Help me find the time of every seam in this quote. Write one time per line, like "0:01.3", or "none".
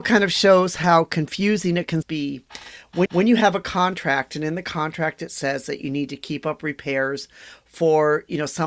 0:02.0
0:03.1